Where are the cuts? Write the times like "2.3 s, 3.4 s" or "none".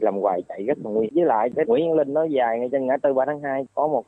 1.1 s, 1.6 s